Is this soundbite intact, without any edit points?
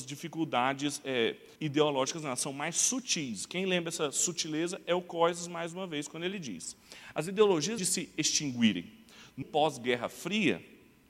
no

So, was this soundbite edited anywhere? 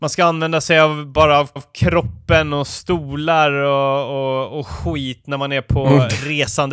yes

